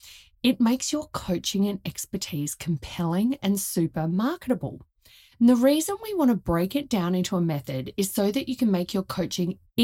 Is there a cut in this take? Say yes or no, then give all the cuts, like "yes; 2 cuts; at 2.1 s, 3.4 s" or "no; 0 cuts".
no; 0 cuts